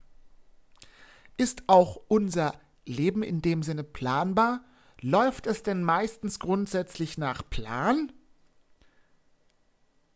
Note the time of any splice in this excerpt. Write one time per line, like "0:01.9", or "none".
none